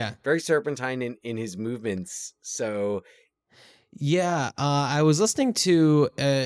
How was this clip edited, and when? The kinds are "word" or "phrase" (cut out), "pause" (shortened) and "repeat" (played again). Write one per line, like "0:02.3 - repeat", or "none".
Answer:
none